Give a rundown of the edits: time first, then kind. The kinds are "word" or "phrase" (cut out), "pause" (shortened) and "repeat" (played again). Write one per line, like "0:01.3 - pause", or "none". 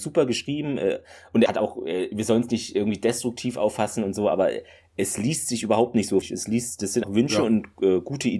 0:01.5 - word
0:06.2 - word
0:07.0 - word